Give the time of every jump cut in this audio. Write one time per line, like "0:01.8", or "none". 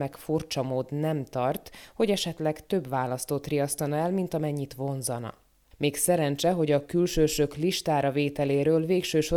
none